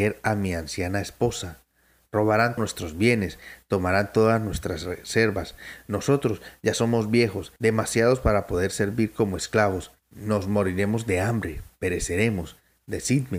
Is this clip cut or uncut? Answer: cut